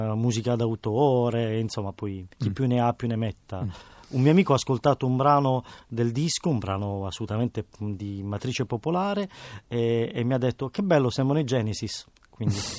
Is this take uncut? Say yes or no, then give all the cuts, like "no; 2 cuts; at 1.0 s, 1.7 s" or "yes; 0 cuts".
no; 1 cut; at 2.3 s